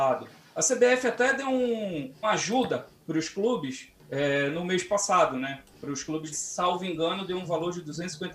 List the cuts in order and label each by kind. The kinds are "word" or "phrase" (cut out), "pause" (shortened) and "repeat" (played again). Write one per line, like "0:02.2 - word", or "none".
0:02.2 - phrase
0:05.7 - pause
0:06.3 - phrase